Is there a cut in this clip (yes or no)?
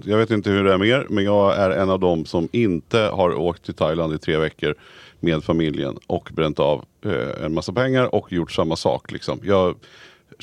no